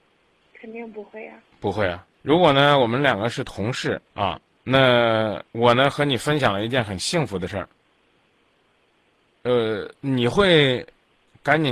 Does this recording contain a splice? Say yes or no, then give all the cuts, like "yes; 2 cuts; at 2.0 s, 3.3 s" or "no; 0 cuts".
yes; 4 cuts; at 2.1 s, 4.1 s, 5.5 s, 10.0 s